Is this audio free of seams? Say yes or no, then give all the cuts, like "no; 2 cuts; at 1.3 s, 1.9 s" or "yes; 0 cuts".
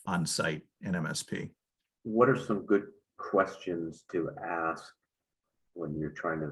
yes; 0 cuts